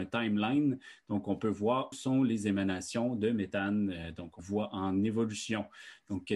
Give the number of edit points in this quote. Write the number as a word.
two